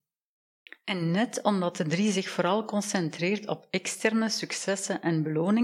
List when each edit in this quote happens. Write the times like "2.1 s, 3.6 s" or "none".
none